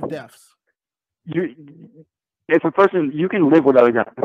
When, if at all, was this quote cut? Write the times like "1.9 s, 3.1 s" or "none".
2.5 s